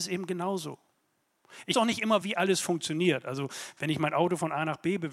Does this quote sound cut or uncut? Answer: cut